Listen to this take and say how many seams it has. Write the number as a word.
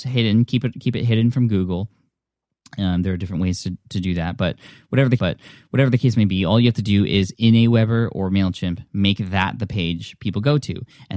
one